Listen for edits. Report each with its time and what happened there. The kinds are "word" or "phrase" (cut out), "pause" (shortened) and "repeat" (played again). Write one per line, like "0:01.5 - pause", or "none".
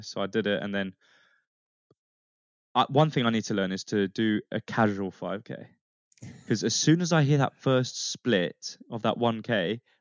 none